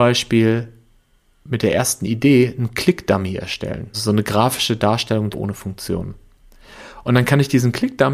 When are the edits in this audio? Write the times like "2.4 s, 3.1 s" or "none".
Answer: 3.9 s, 5.3 s